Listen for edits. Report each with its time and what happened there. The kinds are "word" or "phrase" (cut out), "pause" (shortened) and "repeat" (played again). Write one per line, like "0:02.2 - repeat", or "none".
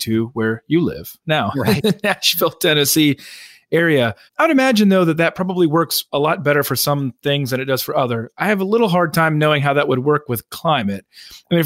0:04.3 - pause

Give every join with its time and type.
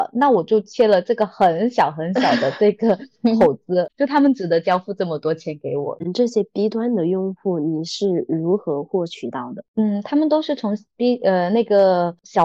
none

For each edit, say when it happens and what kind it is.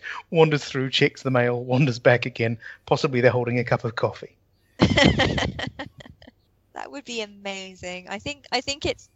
none

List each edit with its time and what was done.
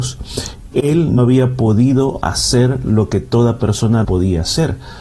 0:01.2 - word
0:04.0 - word

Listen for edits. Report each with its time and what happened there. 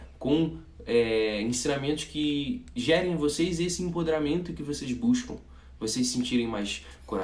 none

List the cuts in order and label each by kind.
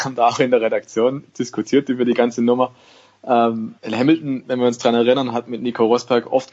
0:03.8 - pause

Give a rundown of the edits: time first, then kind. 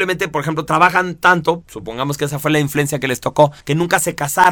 0:01.6 - word
0:03.6 - pause

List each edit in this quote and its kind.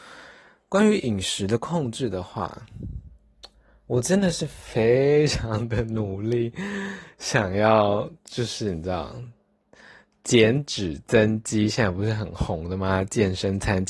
none

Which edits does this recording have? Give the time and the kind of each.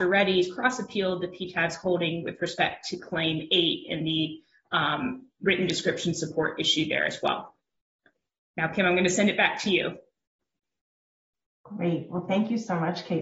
none

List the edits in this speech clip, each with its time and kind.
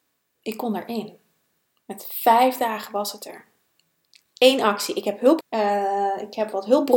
0:05.4 - word

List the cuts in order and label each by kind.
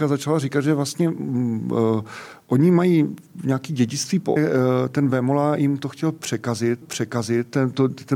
0:04.4 - phrase
0:06.8 - repeat

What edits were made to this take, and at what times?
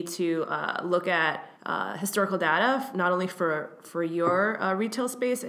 0:01.6 - pause

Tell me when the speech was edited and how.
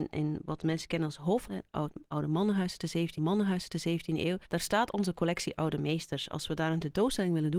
0:01.5 - phrase
0:03.2 - repeat
0:04.5 - pause

